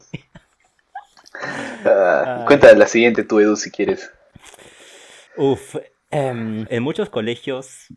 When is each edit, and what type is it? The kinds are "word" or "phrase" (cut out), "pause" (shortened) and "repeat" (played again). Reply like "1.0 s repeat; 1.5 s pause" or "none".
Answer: 5.3 s pause; 6.7 s word